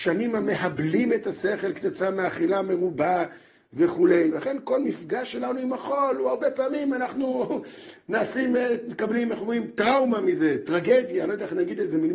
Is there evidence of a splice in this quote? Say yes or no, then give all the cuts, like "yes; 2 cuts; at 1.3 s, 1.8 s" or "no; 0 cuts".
no; 0 cuts